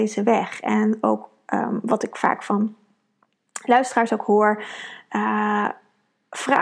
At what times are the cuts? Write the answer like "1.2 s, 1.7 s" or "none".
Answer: none